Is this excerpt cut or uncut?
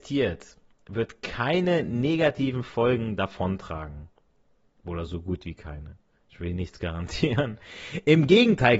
uncut